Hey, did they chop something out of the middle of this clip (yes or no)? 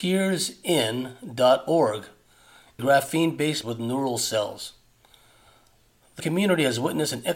yes